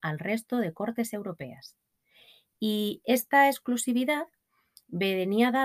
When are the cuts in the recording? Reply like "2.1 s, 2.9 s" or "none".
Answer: none

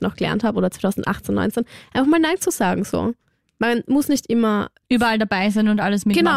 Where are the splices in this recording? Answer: none

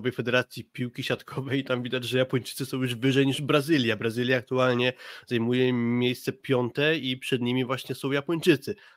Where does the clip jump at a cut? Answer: none

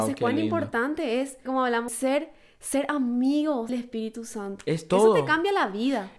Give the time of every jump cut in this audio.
1.5 s, 1.9 s, 3.7 s

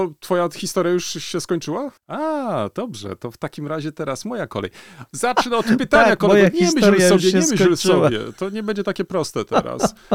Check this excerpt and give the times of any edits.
2.0 s

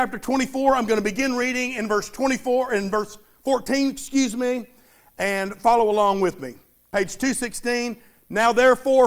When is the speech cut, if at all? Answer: none

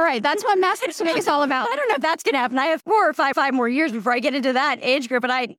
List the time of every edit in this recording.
3.3 s

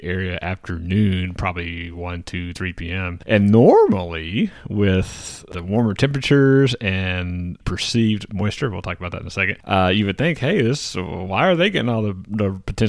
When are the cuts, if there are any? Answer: none

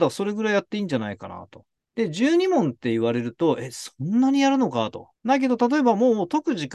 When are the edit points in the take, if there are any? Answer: 1.7 s, 5.2 s

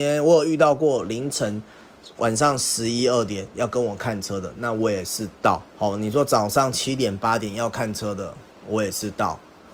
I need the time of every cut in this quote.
5.7 s

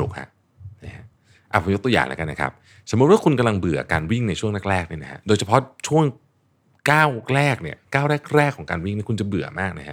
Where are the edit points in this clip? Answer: none

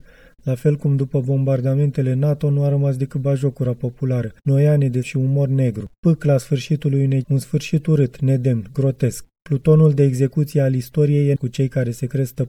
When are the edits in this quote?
4.4 s, 5.0 s, 7.2 s, 11.4 s

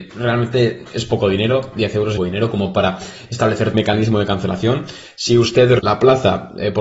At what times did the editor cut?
2.2 s, 3.7 s, 5.8 s

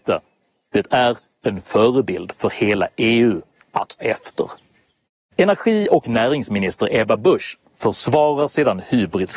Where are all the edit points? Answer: 4.0 s

